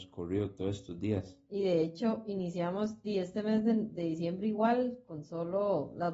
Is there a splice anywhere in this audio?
no; 0 cuts

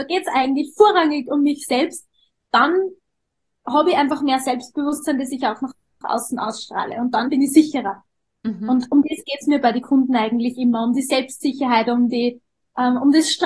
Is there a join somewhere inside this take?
no; 0 cuts

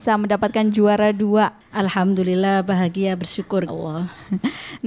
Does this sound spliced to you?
yes; 1 cut; at 3.7 s

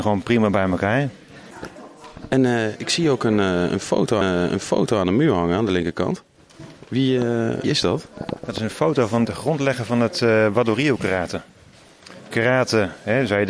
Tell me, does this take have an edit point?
yes; 4 cuts; at 4.2 s, 7.6 s, 9.2 s, 12.3 s

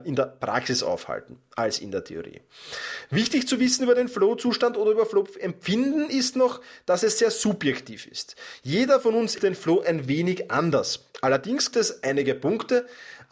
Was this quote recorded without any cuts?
no; 2 cuts; at 9.4 s, 11.7 s

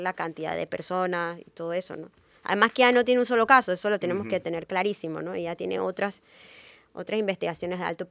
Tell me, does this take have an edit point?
no; 0 cuts

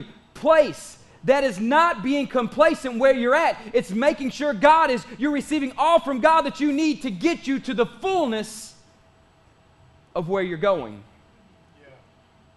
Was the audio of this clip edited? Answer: no; 0 cuts

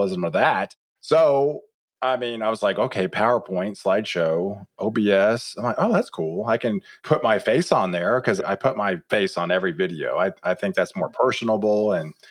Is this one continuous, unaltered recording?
yes; 0 cuts

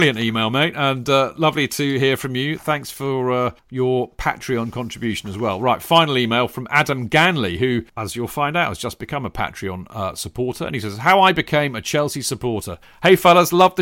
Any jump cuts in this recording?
yes; 3 cuts; at 3.6 s, 7.9 s, 12.8 s

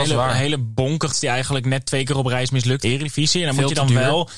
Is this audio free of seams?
no; 2 cuts; at 1.1 s, 2.8 s

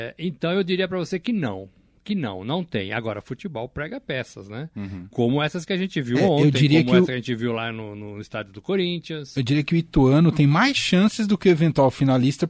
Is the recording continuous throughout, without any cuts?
yes; 0 cuts

